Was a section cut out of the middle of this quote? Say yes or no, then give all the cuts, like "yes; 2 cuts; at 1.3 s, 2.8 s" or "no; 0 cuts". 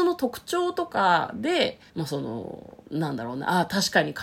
yes; 2 cuts; at 1.9 s, 2.8 s